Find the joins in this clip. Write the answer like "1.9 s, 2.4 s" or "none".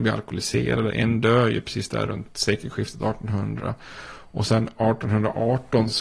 none